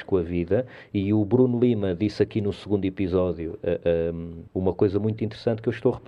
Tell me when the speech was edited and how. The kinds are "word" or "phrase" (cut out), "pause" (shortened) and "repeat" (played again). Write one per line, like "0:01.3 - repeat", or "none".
0:04.5 - pause